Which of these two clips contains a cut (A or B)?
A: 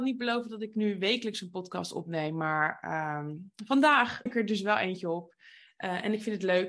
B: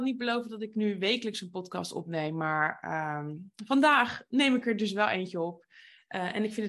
A